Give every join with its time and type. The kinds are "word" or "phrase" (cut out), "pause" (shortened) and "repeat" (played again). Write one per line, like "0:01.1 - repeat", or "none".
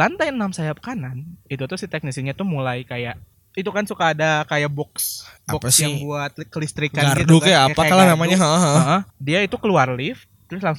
0:03.3 - pause
0:05.4 - pause
0:09.1 - pause